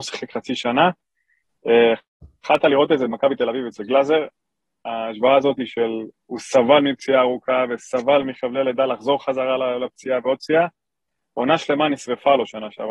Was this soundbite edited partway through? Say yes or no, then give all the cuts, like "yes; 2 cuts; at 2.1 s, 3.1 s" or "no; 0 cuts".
no; 0 cuts